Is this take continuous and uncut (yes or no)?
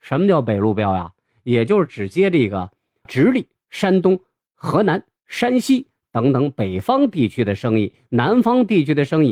no